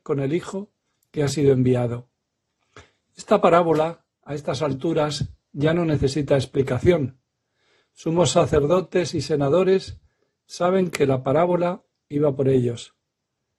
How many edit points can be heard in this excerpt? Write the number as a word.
zero